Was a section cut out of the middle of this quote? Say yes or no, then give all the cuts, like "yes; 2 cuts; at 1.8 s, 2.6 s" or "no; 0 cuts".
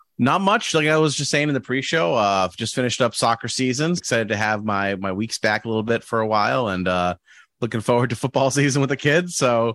yes; 1 cut; at 4.0 s